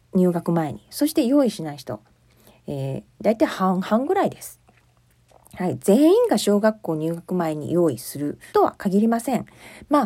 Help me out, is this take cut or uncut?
cut